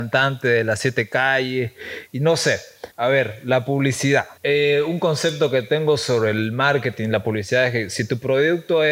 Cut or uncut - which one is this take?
cut